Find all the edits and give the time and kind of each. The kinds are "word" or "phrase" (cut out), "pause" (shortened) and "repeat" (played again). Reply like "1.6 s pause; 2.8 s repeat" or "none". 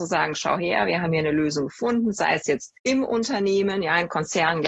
2.8 s pause